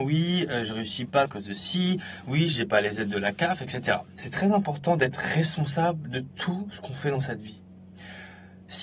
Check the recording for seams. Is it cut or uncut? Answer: cut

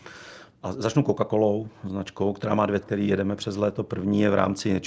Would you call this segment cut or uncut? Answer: cut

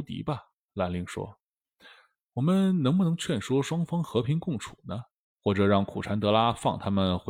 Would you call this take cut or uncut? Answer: uncut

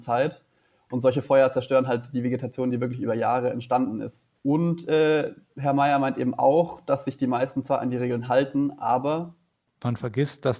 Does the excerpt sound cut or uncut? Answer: cut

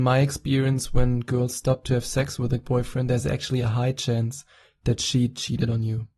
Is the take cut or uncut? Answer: uncut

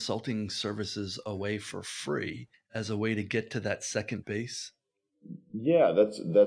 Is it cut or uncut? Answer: cut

